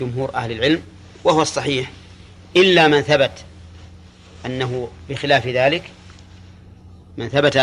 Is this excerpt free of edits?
yes; 0 cuts

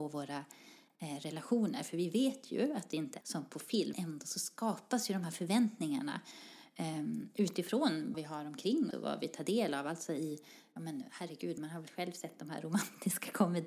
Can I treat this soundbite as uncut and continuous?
no; 4 cuts; at 3.2 s, 3.9 s, 8.1 s, 8.9 s

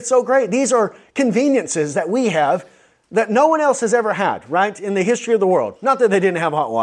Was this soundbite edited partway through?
no; 0 cuts

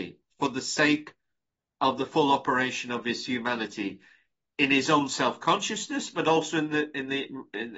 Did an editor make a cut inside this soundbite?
no; 0 cuts

